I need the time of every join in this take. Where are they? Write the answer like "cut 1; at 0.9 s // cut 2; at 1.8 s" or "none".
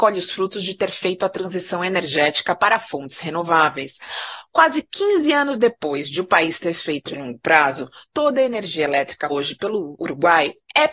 cut 1; at 7.0 s // cut 2; at 8.1 s // cut 3; at 9.3 s